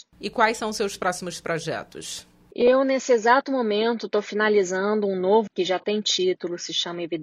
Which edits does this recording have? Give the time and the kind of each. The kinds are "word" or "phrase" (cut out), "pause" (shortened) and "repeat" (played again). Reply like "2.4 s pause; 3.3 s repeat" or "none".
5.5 s word

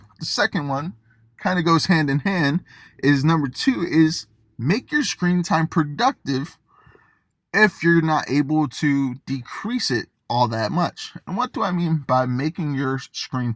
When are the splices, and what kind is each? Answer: none

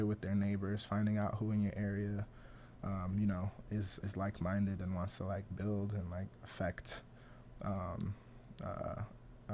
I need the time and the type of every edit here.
4.0 s word

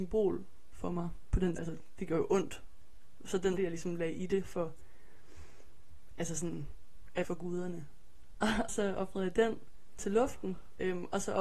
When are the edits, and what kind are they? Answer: 1.6 s word; 3.6 s word; 7.2 s word; 8.7 s word

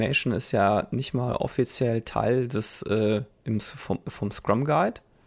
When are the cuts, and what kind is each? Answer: none

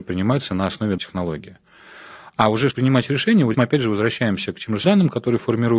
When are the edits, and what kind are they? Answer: 1.0 s word; 2.7 s word; 3.5 s word; 4.8 s word

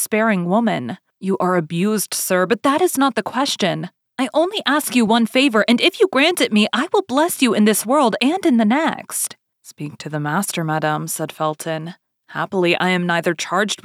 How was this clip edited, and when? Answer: none

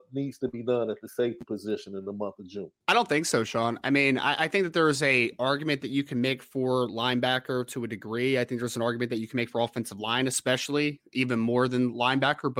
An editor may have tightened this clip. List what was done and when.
2.8 s pause

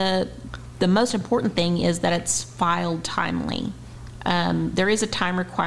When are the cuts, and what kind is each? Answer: none

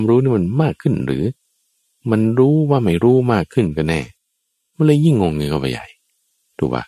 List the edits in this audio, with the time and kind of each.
none

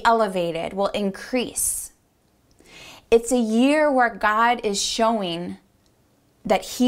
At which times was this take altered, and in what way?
none

